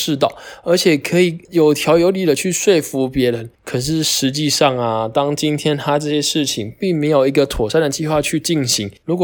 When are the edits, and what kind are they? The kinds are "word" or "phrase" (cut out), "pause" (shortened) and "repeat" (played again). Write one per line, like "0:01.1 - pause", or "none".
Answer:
0:03.5 - pause